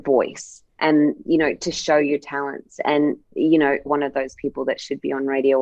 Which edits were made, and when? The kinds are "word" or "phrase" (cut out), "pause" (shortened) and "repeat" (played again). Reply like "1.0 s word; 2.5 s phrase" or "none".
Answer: 3.8 s word